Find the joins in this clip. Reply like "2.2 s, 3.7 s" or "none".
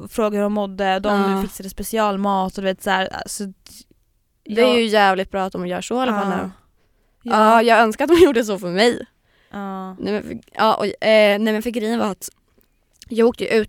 none